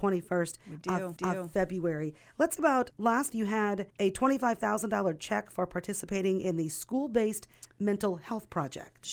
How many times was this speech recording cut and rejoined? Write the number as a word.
five